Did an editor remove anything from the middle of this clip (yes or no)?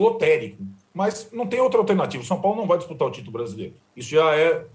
no